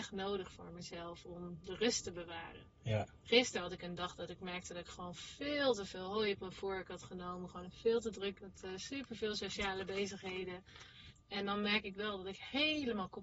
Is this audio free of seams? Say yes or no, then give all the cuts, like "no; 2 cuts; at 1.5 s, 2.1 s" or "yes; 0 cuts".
no; 1 cut; at 8.4 s